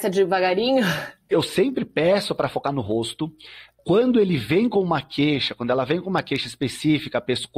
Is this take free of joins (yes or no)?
yes